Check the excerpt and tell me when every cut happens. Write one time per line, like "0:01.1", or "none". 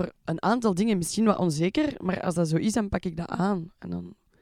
none